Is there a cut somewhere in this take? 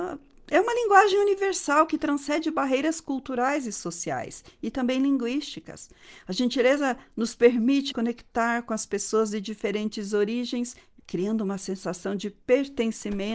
yes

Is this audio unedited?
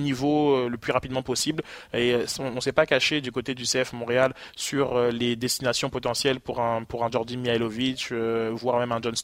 yes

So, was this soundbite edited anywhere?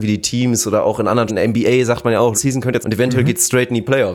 yes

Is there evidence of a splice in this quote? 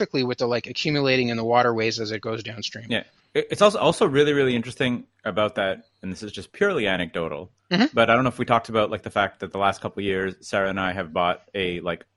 no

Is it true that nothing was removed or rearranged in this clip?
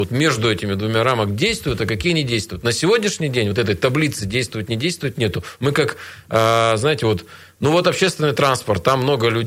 yes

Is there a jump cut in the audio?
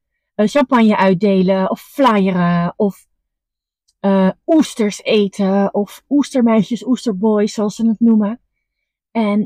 no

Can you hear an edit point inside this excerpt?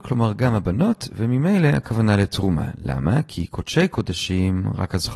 no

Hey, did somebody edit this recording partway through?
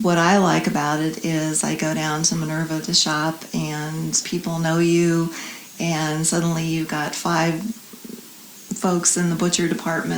no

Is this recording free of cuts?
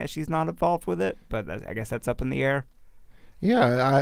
yes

